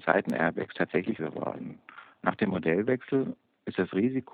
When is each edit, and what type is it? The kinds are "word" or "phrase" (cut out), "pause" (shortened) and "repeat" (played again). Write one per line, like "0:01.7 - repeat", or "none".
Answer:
0:01.2 - word